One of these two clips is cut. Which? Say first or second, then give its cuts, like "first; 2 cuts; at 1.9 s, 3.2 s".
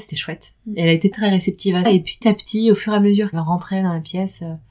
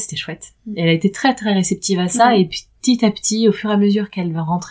first; 4 cuts; at 1.1 s, 1.8 s, 2.2 s, 3.3 s